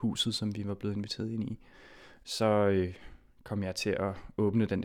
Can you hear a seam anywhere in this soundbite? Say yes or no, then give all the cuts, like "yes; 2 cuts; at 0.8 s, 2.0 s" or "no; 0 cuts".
no; 0 cuts